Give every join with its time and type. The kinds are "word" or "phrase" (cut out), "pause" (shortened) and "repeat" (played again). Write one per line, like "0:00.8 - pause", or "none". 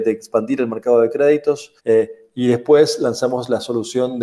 0:01.8 - pause

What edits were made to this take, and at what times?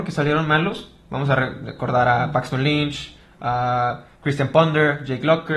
0:04.1 - pause

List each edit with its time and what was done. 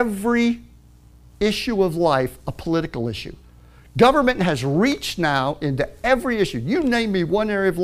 none

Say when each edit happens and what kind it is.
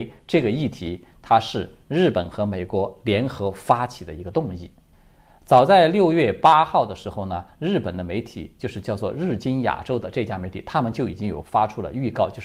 0:04.9 - pause

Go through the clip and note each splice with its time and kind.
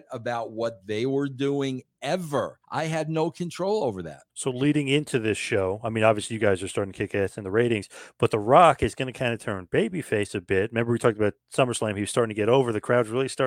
0:02.6 - pause
0:04.3 - pause

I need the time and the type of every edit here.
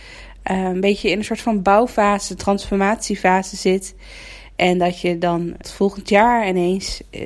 0:05.6 - word

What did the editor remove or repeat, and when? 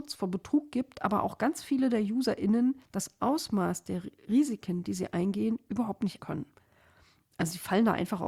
0:02.8 - pause
0:06.2 - word

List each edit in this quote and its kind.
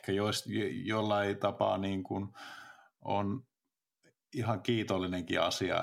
none

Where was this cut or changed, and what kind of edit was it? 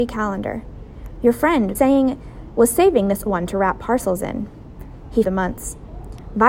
0:01.7 - phrase
0:03.3 - word
0:05.2 - phrase

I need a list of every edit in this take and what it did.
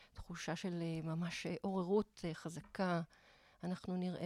none

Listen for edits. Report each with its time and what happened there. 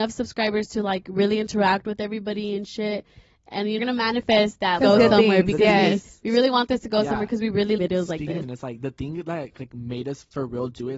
0:03.8 - phrase
0:04.8 - phrase
0:07.8 - phrase
0:08.4 - word

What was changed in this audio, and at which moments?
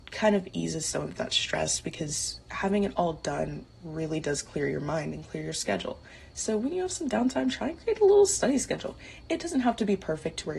none

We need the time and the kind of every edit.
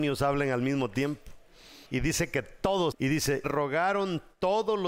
0:01.9 - pause
0:02.9 - word
0:03.4 - phrase

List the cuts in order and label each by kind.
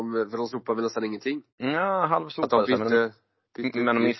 0:01.5 - pause

